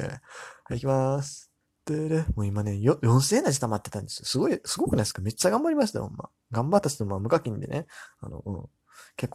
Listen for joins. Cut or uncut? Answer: cut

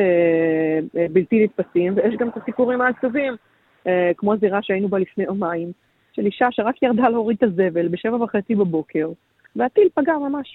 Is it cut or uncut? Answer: uncut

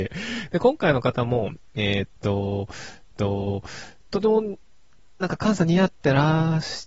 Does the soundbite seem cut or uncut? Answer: cut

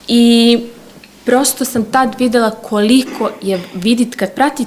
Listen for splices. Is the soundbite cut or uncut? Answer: uncut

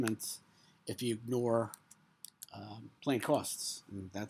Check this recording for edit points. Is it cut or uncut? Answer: cut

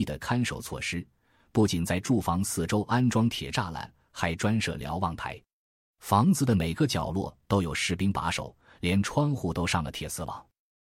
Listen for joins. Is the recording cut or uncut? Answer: uncut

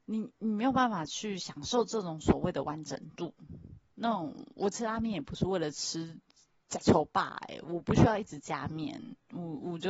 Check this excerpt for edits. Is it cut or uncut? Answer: uncut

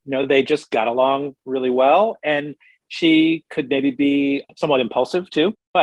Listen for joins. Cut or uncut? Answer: uncut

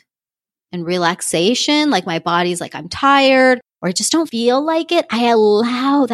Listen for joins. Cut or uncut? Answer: uncut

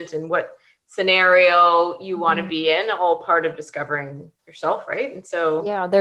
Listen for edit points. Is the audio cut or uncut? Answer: cut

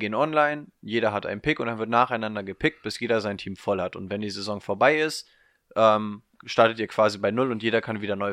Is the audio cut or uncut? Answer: uncut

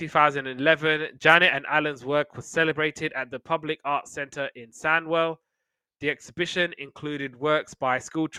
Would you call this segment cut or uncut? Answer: uncut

